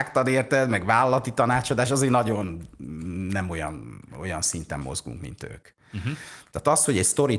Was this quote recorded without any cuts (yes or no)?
yes